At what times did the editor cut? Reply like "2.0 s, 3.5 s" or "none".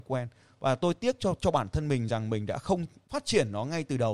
none